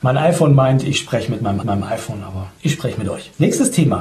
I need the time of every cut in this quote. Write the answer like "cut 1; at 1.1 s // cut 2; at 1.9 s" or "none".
cut 1; at 1.6 s // cut 2; at 2.6 s